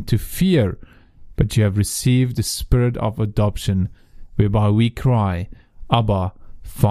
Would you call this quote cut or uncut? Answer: uncut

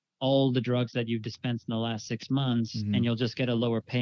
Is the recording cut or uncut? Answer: uncut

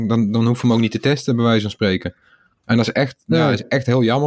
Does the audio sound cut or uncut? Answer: uncut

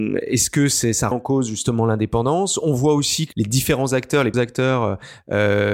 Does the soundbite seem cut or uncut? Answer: cut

